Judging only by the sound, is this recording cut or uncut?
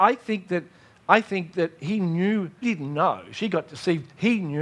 cut